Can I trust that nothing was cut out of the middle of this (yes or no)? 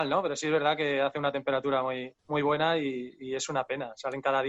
no